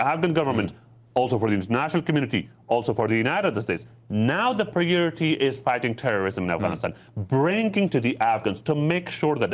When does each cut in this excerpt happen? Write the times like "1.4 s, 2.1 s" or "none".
7.9 s